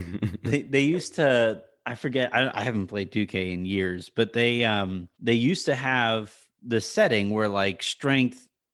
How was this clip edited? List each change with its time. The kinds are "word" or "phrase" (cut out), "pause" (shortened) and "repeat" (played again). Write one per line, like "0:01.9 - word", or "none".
0:05.1 - pause